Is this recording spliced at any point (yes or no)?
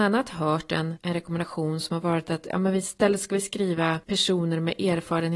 no